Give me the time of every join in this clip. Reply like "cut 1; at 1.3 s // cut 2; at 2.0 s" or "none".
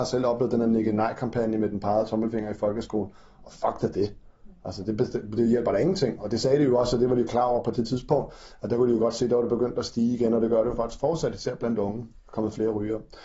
none